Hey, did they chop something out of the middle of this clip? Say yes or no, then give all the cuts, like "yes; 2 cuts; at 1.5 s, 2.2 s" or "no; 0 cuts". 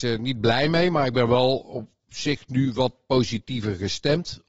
no; 0 cuts